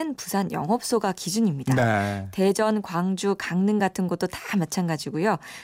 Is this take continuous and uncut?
yes; 0 cuts

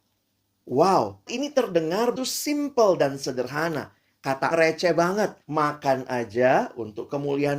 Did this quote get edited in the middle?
yes; 4 cuts; at 1.3 s, 2.2 s, 4.5 s, 5.4 s

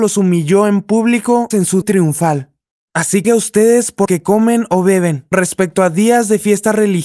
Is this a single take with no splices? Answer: no; 5 cuts; at 1.5 s, 1.8 s, 3.2 s, 4.1 s, 5.3 s

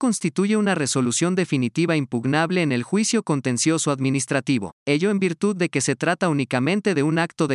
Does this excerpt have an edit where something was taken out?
yes; 1 cut; at 4.8 s

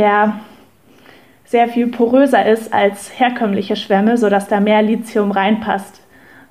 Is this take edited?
no; 0 cuts

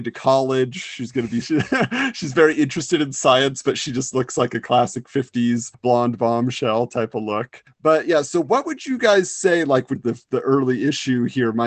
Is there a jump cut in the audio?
yes; 2 cuts; at 1.4 s, 10.0 s

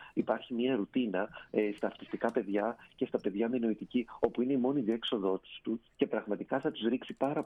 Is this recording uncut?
yes; 0 cuts

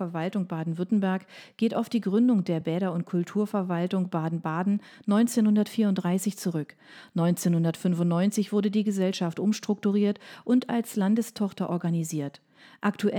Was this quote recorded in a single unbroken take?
yes; 0 cuts

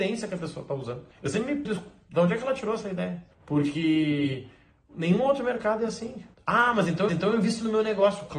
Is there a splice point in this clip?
yes; 5 cuts; at 1.1 s, 1.7 s, 3.3 s, 6.3 s, 7.1 s

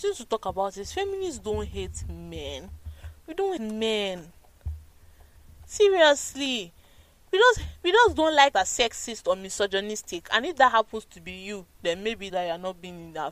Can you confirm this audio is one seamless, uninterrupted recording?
no; 3 cuts; at 3.6 s, 8.5 s, 12.3 s

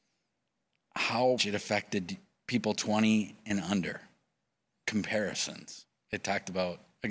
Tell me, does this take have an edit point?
yes; 2 cuts; at 1.4 s, 4.8 s

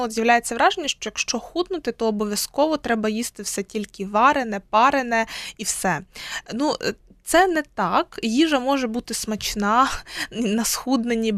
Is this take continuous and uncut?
yes; 0 cuts

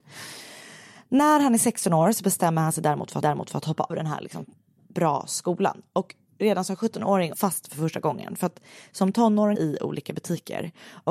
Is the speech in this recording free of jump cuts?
no; 4 cuts; at 3.2 s, 3.9 s, 7.3 s, 9.5 s

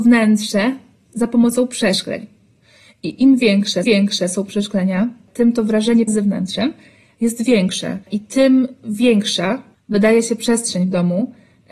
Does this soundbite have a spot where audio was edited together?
yes; 3 cuts; at 3.8 s, 6.1 s, 8.0 s

